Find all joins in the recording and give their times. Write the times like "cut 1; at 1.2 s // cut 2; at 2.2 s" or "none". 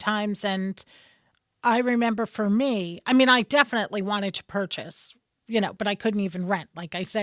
none